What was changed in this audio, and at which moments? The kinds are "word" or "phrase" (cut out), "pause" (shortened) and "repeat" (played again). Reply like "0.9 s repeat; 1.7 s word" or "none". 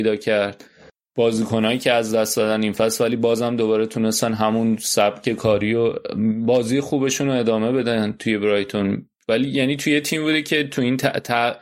none